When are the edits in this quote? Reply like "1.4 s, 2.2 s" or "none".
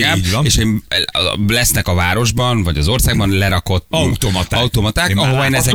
3.9 s

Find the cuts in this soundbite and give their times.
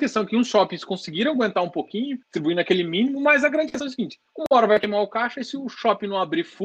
2.2 s, 4.3 s

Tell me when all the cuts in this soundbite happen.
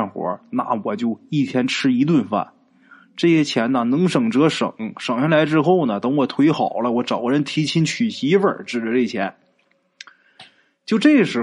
none

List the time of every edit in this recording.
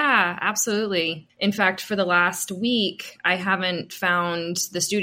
none

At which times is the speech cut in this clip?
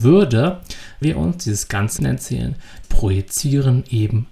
1.0 s, 2.0 s, 2.8 s

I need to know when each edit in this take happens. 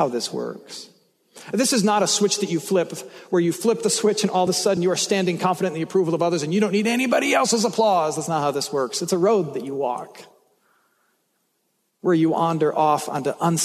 none

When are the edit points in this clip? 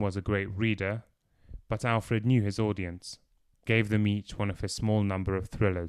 3.7 s

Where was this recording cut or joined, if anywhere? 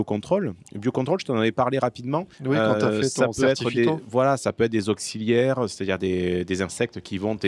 2.3 s

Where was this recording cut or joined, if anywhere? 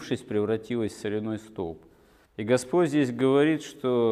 none

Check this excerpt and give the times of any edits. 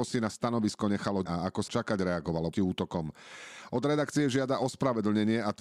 1.3 s, 1.7 s, 2.5 s

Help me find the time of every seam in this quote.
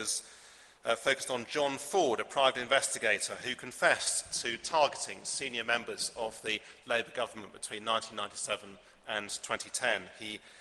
none

